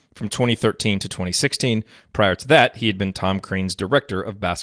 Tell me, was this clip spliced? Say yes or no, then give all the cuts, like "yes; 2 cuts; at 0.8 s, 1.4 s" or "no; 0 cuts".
no; 0 cuts